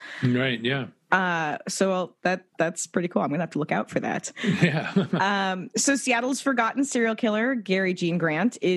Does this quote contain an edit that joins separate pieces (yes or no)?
no